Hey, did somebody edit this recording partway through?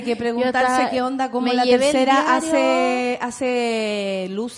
no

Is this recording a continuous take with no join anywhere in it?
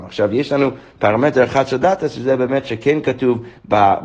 yes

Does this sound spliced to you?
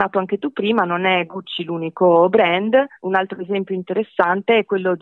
yes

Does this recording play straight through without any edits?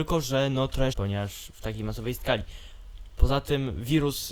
no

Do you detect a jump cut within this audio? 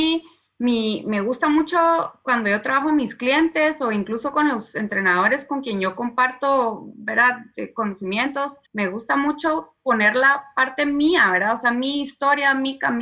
yes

